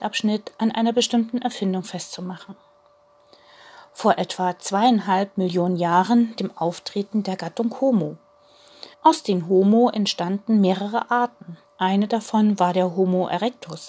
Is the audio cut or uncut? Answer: cut